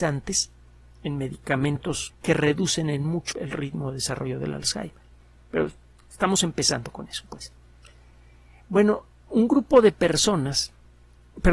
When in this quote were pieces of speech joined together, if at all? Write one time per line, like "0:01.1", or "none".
0:02.1
0:03.3